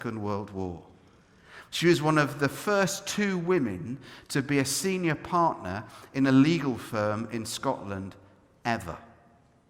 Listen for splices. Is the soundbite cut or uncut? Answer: uncut